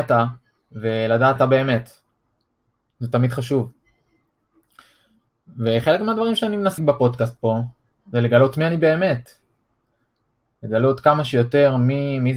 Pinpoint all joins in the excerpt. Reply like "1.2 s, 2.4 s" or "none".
1.4 s, 6.8 s